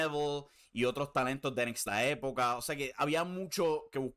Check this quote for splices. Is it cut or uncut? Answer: cut